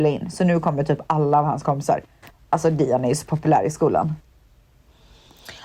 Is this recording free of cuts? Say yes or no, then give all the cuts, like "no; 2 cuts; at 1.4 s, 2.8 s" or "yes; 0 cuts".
yes; 0 cuts